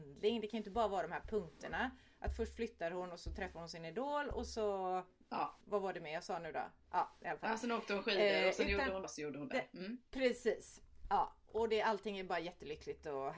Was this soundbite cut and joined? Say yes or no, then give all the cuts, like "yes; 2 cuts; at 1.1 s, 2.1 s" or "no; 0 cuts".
yes; 2 cuts; at 5.6 s, 9.0 s